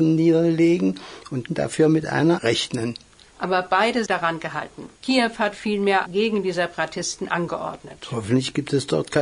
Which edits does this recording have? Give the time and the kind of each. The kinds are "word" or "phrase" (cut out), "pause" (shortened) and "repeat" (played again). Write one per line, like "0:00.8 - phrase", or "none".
0:01.5 - word
0:02.4 - word
0:04.1 - phrase
0:05.0 - pause
0:06.1 - phrase